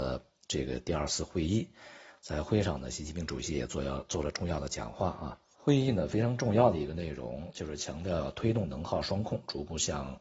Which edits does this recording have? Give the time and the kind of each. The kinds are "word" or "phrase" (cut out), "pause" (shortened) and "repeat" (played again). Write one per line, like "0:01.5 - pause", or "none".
0:05.5 - pause